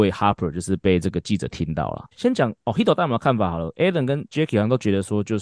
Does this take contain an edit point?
yes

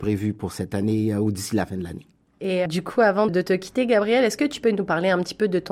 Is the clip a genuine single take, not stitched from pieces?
no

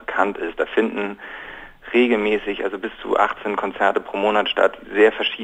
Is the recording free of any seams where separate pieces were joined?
yes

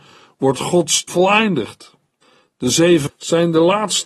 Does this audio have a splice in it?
yes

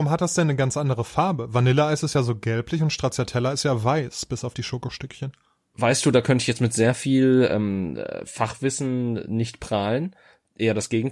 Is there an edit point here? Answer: no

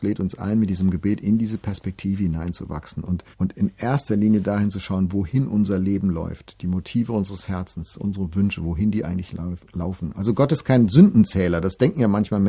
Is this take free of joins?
no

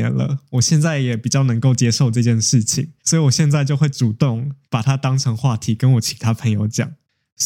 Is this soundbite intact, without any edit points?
no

